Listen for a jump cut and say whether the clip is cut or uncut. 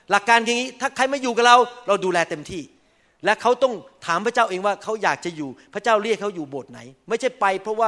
uncut